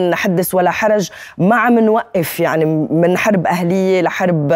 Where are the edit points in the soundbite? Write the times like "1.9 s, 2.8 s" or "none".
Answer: none